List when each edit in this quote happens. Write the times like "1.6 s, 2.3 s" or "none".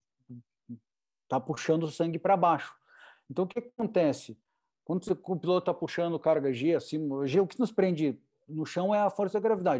none

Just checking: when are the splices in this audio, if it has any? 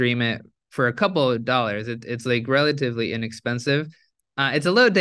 none

